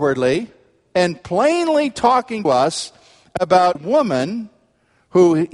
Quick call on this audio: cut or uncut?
cut